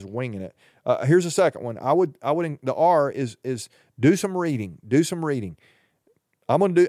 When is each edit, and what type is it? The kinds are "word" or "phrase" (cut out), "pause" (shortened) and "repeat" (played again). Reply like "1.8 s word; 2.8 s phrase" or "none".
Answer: none